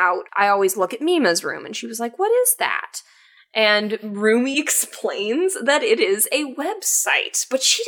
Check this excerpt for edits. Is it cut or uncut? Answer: uncut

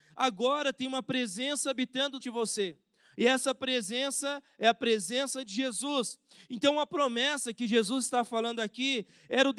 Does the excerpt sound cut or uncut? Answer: cut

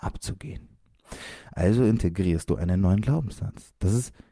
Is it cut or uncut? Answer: uncut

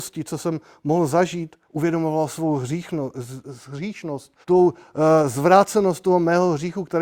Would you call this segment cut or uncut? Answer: cut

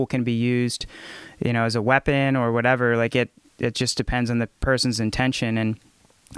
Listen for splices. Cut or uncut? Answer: uncut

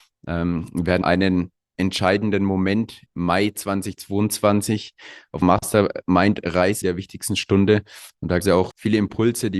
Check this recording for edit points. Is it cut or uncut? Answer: cut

